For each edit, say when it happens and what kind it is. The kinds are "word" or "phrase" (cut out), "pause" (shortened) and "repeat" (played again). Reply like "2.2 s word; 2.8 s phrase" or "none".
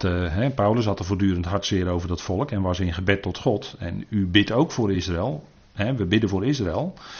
none